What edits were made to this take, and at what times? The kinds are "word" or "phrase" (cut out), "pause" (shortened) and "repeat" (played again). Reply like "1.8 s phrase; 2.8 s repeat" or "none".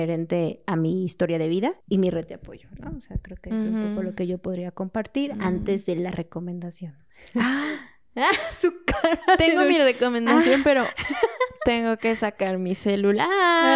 1.8 s pause